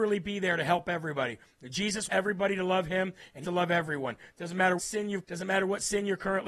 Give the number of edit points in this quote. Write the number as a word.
four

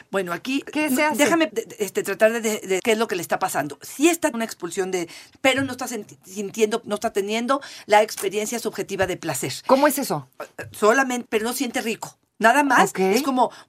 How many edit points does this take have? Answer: six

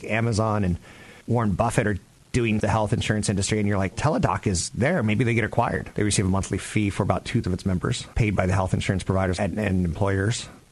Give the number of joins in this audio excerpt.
five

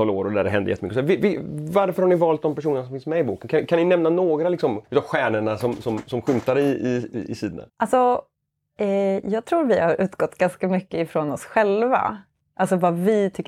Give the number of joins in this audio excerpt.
two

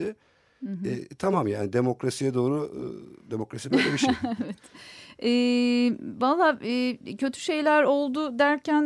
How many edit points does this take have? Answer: zero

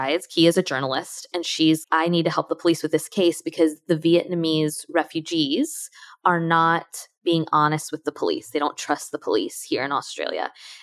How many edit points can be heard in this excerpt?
one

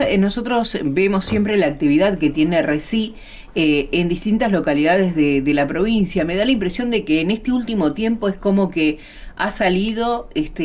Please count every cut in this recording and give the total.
zero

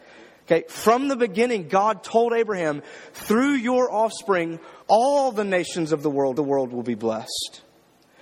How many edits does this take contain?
two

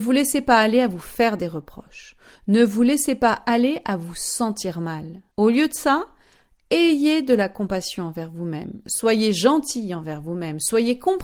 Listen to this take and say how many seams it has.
one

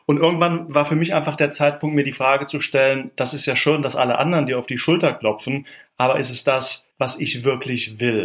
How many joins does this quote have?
one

